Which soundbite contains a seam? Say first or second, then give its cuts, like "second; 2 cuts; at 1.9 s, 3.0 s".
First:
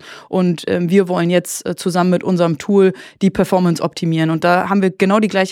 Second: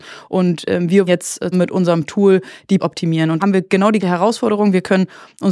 second; 5 cuts; at 1.1 s, 1.5 s, 2.8 s, 3.4 s, 4.0 s